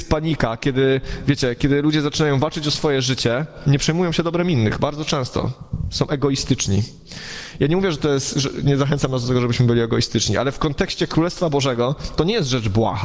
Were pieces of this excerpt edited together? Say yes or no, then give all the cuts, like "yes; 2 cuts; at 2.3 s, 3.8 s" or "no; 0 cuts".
no; 0 cuts